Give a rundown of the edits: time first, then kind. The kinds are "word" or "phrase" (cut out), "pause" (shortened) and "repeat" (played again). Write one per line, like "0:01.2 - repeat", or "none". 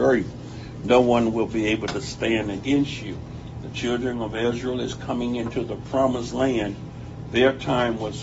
none